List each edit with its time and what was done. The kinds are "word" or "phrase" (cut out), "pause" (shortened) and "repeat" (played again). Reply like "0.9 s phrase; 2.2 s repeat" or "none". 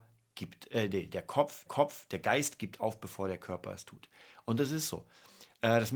1.7 s repeat